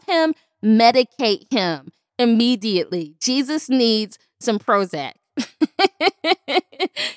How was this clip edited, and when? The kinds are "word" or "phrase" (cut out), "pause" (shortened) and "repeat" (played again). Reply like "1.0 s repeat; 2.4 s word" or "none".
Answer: none